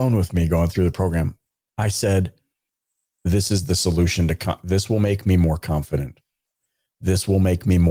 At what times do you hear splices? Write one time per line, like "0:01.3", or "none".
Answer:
none